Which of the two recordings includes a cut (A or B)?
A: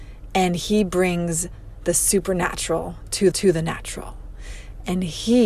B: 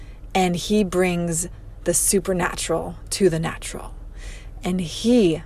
A